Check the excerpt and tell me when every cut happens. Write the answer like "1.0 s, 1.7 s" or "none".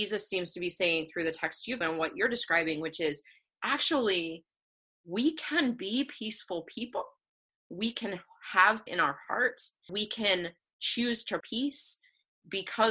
1.8 s, 8.9 s, 9.9 s, 11.4 s